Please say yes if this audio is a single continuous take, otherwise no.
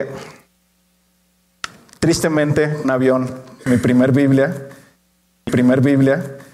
no